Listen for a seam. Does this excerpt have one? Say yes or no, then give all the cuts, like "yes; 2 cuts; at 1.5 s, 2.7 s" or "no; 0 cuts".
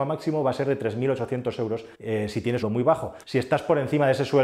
yes; 3 cuts; at 1.9 s, 2.6 s, 3.2 s